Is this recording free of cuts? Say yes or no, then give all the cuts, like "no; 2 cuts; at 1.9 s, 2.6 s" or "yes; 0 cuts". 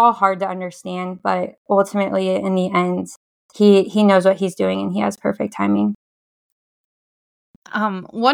yes; 0 cuts